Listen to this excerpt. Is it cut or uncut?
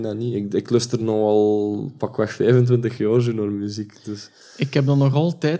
uncut